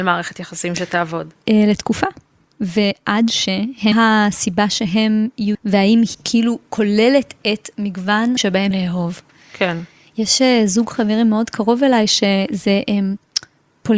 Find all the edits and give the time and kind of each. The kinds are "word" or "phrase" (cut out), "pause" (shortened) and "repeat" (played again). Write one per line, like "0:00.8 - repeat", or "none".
0:01.4 - pause
0:03.9 - phrase
0:05.5 - word
0:06.1 - word
0:08.4 - word
0:08.7 - phrase